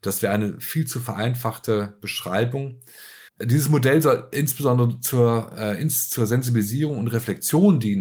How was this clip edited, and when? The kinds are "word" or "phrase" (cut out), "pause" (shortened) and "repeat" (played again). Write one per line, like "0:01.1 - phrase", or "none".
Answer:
0:03.3 - pause